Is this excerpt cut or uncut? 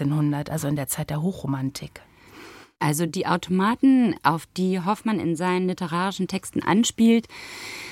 uncut